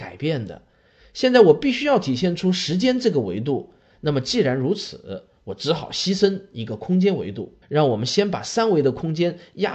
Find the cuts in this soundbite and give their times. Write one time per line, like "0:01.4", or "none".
0:07.6